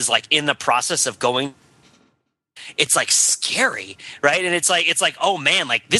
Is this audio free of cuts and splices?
yes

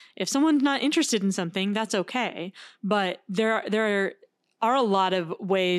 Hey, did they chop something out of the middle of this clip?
no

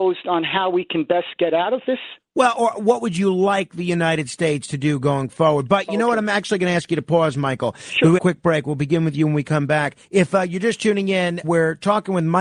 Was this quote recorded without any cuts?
no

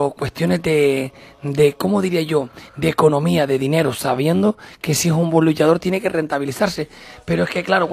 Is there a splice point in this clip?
no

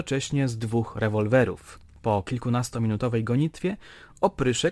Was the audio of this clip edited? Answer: no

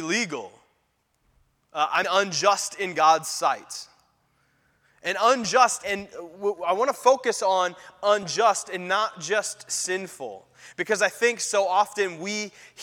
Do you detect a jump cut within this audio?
yes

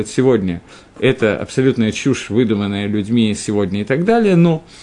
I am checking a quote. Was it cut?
no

